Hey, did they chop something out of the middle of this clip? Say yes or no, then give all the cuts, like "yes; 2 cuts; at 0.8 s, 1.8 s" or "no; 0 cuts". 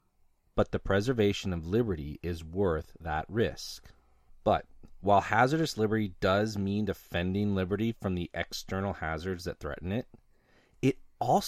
no; 0 cuts